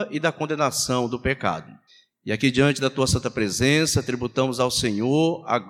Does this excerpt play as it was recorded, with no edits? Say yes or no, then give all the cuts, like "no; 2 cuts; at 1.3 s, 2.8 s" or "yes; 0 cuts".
no; 1 cut; at 1.9 s